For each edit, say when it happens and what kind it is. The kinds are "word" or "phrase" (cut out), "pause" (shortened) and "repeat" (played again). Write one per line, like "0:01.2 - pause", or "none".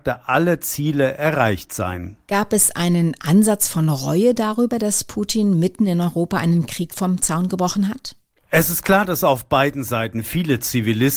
none